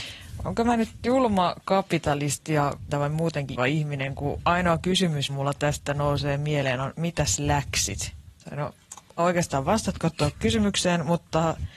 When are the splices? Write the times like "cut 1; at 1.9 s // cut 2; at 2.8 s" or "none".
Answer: cut 1; at 2.9 s // cut 2; at 3.6 s // cut 3; at 5.3 s // cut 4; at 9.2 s